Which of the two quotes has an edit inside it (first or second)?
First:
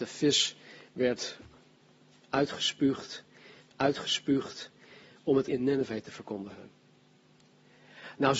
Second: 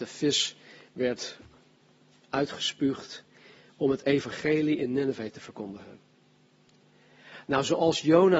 first